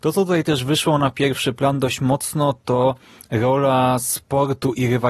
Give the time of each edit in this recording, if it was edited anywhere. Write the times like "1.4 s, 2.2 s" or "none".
none